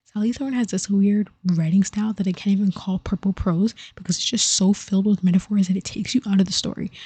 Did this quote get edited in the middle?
no; 0 cuts

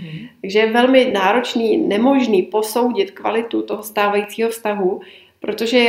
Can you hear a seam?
no; 0 cuts

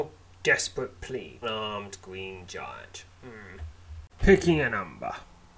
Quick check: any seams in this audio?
yes; 2 cuts; at 1.4 s, 4.1 s

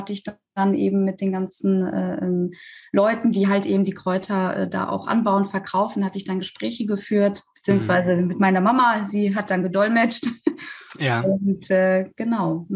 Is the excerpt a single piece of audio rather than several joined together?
yes; 0 cuts

